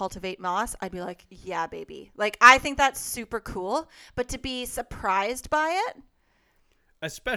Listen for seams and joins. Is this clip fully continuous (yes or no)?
yes